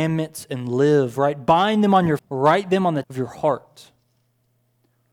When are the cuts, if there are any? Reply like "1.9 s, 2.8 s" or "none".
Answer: 2.2 s, 3.0 s